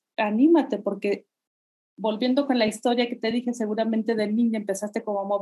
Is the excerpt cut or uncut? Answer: uncut